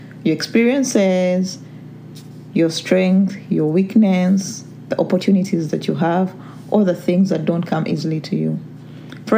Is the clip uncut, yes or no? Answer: yes